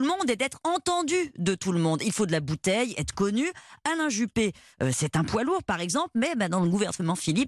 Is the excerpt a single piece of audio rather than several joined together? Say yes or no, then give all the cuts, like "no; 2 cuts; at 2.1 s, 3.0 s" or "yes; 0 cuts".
yes; 0 cuts